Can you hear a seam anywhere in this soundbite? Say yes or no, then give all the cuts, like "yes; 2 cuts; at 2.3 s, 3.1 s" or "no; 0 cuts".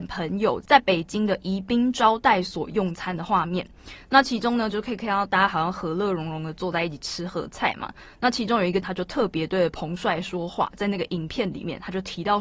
no; 0 cuts